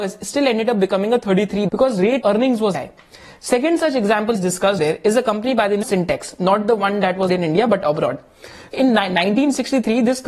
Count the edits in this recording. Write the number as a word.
eight